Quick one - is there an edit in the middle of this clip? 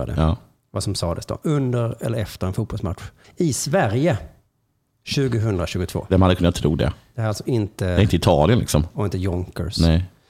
yes; 1 cut; at 3.2 s

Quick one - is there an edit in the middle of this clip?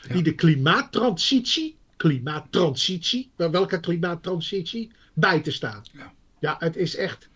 no; 0 cuts

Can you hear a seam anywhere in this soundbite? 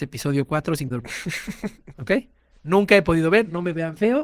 yes; 1 cut; at 0.9 s

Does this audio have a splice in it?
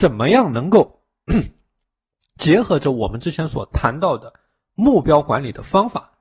no; 0 cuts

